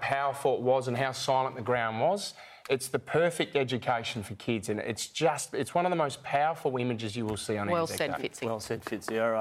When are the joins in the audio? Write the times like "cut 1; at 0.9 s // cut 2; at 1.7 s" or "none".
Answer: none